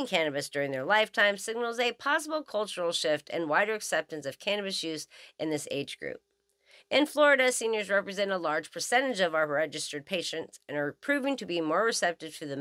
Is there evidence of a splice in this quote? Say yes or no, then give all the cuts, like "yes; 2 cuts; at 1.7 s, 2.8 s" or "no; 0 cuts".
no; 0 cuts